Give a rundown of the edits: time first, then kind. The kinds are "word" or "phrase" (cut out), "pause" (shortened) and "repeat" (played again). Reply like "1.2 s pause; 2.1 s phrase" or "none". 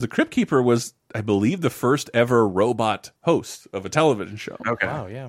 3.2 s pause